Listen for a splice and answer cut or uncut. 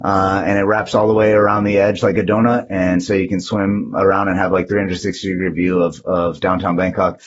uncut